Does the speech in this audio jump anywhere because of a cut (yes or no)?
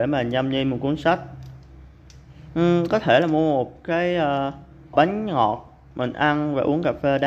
yes